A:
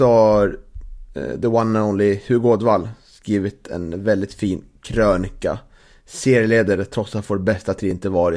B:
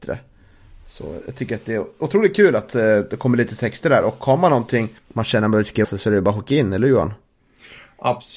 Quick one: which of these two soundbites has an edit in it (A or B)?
B